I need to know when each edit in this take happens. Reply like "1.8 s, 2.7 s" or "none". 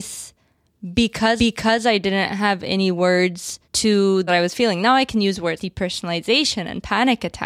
1.4 s, 3.6 s, 4.3 s, 5.6 s